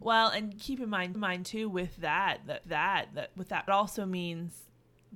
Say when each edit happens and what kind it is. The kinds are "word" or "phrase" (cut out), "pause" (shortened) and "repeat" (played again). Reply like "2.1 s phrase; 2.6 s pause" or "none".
1.1 s repeat; 2.6 s repeat; 3.7 s phrase